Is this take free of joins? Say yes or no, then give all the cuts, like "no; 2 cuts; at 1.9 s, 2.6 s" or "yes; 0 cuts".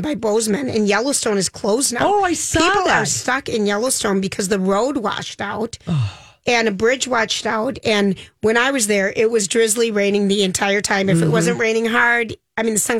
yes; 0 cuts